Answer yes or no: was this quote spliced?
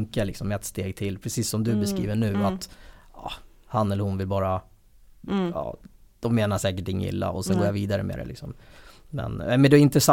yes